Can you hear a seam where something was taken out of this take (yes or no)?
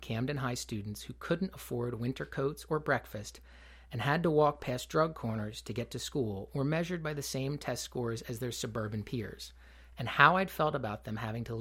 no